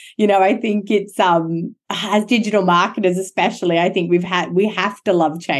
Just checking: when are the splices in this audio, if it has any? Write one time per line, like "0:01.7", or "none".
none